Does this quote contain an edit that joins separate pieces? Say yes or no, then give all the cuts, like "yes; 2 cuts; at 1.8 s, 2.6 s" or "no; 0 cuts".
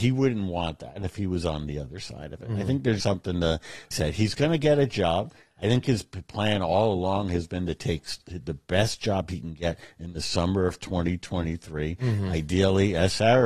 yes; 2 cuts; at 3.0 s, 3.9 s